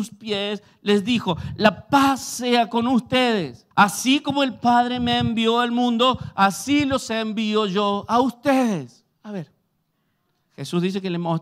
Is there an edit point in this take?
yes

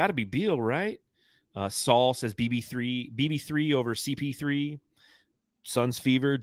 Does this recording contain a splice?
no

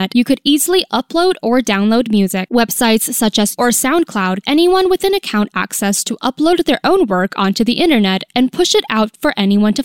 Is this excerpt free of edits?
no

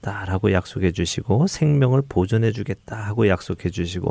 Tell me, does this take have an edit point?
no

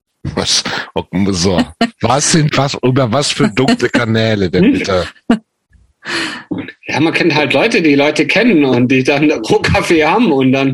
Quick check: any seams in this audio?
yes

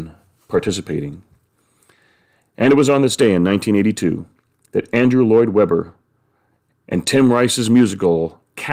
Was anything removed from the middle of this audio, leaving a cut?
no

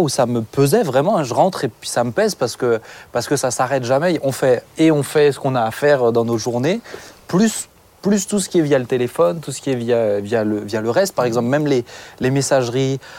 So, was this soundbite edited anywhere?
no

